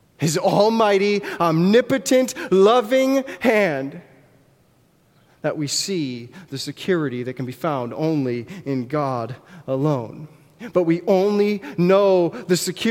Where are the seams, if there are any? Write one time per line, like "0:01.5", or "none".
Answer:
none